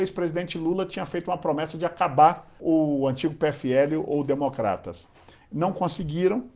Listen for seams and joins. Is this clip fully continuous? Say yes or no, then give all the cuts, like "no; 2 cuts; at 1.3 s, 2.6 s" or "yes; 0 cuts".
no; 1 cut; at 2.6 s